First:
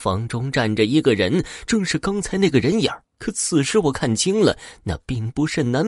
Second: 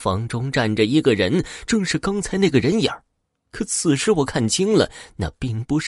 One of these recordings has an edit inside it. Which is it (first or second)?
first